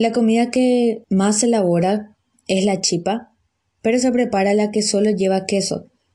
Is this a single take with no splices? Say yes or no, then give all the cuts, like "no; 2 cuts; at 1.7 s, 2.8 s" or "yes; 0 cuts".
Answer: yes; 0 cuts